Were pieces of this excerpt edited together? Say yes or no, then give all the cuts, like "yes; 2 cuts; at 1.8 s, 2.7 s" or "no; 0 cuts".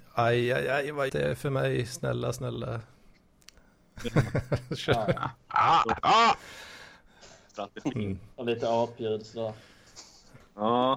yes; 3 cuts; at 1.1 s, 6.0 s, 8.3 s